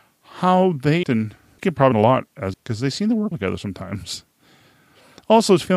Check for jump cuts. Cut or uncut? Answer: cut